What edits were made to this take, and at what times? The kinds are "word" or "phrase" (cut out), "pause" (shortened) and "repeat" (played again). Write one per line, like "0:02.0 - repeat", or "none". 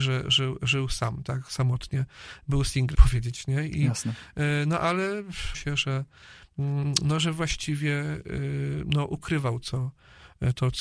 0:02.9 - word
0:05.5 - word
0:09.6 - word